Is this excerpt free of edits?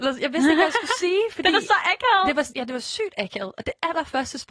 no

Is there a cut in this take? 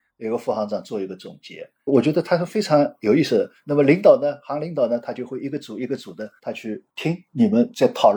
yes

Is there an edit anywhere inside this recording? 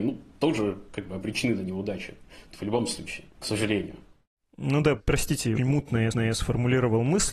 yes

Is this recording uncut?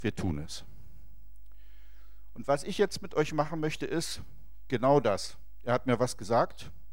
yes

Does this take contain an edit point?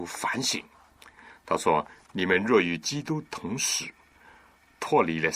no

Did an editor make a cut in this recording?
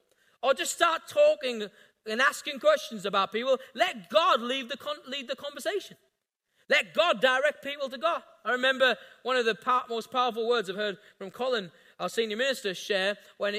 no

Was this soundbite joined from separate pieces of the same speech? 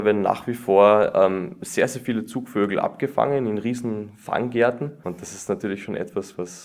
no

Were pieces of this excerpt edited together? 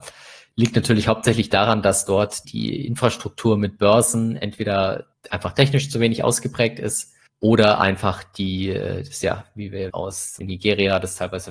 yes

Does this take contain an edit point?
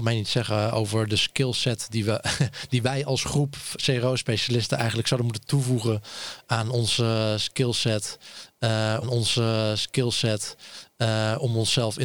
yes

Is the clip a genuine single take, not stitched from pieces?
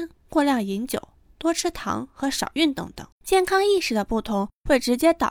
no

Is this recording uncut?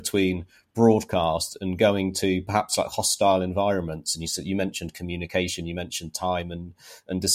yes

